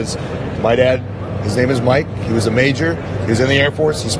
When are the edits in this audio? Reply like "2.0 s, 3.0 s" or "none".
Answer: none

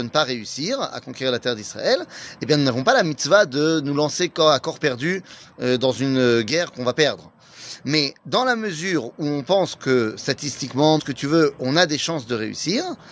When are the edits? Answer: 8.2 s, 11.0 s

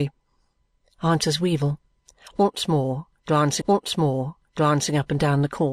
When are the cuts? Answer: 3.6 s

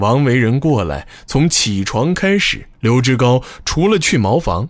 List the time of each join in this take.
2.7 s

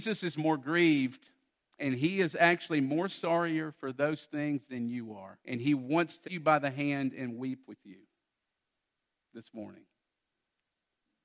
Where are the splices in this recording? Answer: 1.5 s, 5.4 s, 6.2 s

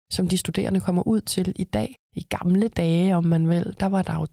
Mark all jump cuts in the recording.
2.0 s

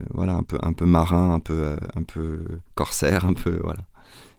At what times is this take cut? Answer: 2.7 s

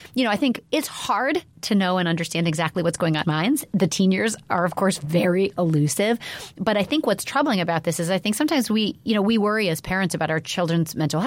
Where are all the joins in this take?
3.2 s

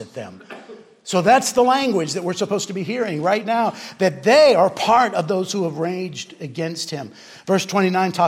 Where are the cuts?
none

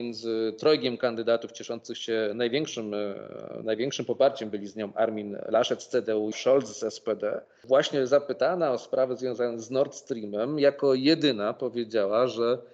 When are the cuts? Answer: 6.3 s

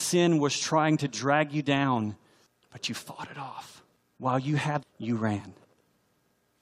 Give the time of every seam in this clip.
4.8 s

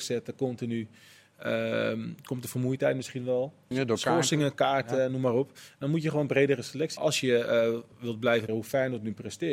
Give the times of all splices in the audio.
3.7 s, 7.0 s, 8.5 s

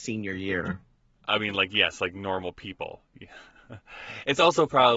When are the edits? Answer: 0.9 s

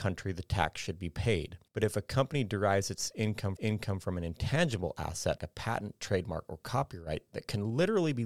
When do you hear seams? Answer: 1.7 s, 3.6 s, 5.4 s

